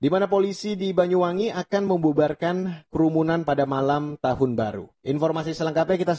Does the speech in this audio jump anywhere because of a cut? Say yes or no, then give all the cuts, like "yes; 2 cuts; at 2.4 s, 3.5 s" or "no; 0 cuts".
no; 0 cuts